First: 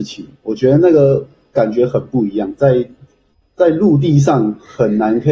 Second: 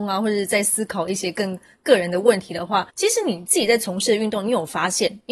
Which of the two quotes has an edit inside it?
second; 1 cut; at 2.9 s

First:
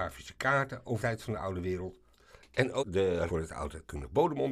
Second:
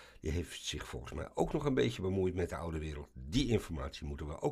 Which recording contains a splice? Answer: first; 3 cuts; at 1.0 s, 2.8 s, 3.3 s

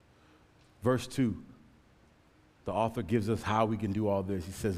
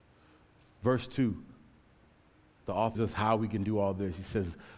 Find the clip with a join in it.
second; 1 cut; at 2.9 s

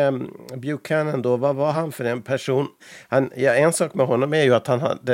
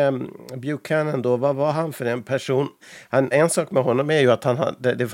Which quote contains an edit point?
second; 1 cut; at 3.3 s

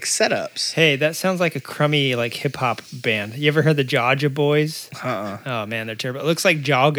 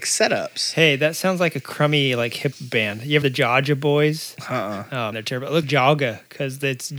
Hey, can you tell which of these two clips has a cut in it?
second; 4 cuts; at 2.5 s, 3.2 s, 5.1 s, 5.6 s

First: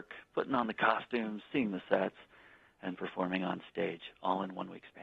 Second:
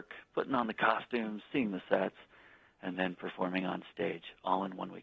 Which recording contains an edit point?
first; 1 cut; at 2.9 s

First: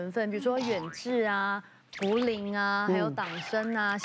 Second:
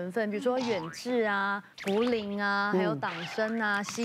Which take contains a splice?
second; 1 cut; at 1.7 s

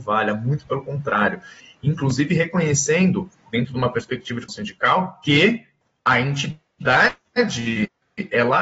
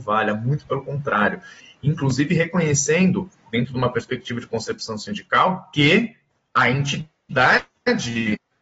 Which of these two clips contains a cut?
first; 1 cut; at 4.5 s

